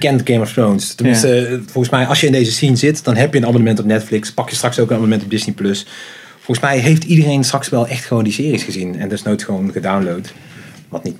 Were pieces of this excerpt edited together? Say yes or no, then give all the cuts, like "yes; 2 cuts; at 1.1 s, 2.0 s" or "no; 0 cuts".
no; 0 cuts